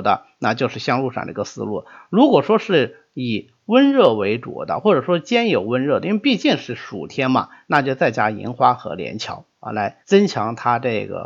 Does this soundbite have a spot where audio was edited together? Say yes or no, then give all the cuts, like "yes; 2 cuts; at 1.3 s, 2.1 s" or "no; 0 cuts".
yes; 1 cut; at 10.0 s